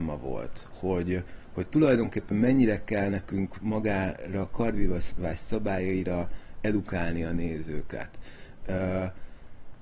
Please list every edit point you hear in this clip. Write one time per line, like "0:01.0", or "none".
none